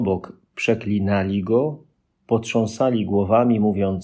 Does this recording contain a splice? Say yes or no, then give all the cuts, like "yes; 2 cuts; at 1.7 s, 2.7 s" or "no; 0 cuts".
no; 0 cuts